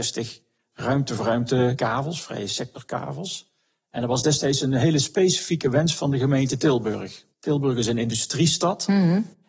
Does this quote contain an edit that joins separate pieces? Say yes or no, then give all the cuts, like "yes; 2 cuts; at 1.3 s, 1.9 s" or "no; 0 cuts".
yes; 1 cut; at 7.3 s